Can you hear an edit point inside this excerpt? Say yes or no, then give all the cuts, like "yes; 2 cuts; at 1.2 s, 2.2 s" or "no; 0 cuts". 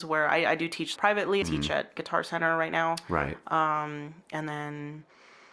yes; 2 cuts; at 1.0 s, 1.4 s